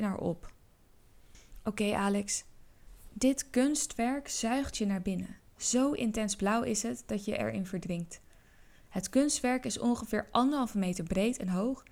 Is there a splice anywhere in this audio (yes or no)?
no